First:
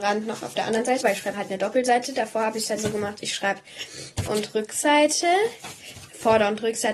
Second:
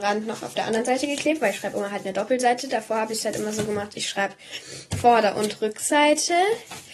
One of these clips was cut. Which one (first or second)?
first